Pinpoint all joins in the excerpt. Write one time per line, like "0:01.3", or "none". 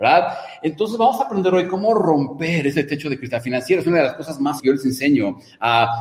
0:04.6

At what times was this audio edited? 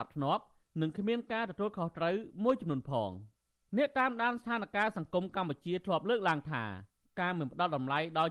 none

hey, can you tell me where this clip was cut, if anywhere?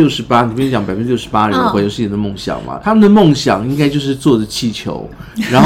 0:02.8

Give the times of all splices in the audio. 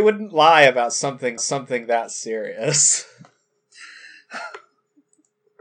0:01.4

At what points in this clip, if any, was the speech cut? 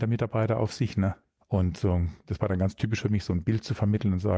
0:01.2

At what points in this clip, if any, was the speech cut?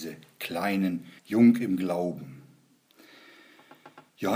0:01.2

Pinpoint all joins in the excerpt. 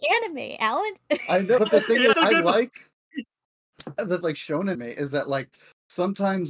0:01.6
0:02.1
0:04.2
0:04.7

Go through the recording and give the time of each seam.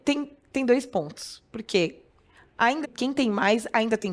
0:02.8

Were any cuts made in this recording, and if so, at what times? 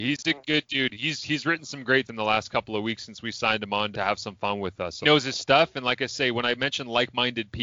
0:02.1
0:03.9
0:05.0

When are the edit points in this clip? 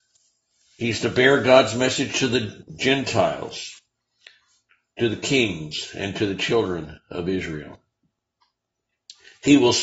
none

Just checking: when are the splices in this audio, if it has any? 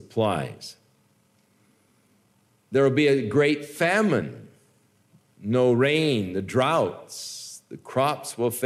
none

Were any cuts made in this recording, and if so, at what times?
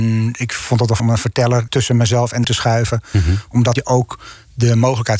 0:01.0
0:01.7
0:02.4
0:03.8

